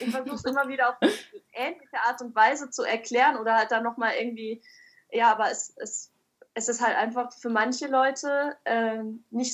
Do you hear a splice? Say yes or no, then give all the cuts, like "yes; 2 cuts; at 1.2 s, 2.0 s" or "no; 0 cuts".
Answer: no; 0 cuts